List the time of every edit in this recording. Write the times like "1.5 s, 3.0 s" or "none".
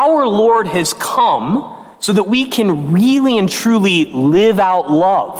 1.9 s